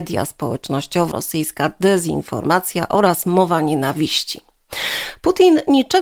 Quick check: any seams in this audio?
yes; 1 cut; at 1.1 s

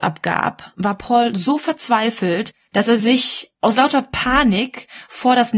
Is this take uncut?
yes; 0 cuts

